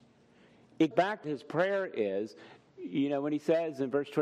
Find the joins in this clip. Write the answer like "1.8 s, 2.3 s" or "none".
0.9 s, 1.2 s